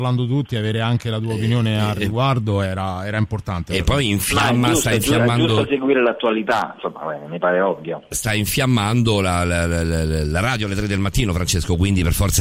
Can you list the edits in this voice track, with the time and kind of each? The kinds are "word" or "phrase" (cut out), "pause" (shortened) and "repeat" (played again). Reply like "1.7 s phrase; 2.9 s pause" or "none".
none